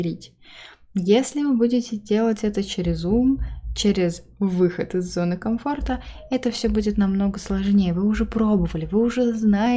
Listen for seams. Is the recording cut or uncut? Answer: uncut